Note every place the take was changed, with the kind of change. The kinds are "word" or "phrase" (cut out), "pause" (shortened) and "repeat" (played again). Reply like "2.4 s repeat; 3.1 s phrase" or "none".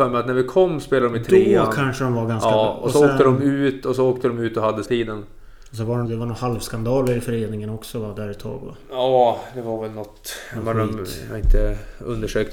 4.9 s phrase; 6.1 s word